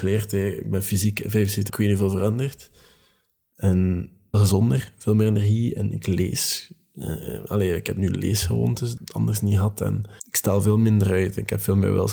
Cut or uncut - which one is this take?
cut